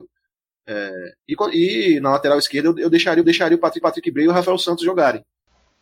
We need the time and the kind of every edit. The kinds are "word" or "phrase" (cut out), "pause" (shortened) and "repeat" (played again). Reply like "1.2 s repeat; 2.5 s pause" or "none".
1.2 s pause; 3.2 s repeat; 3.8 s repeat